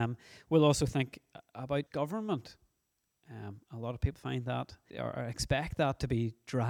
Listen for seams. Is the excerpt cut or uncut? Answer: cut